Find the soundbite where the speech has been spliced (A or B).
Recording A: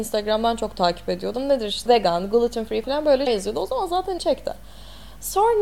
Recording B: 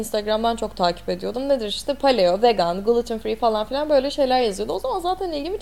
A